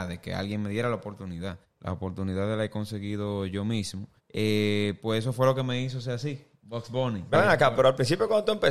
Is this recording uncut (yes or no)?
no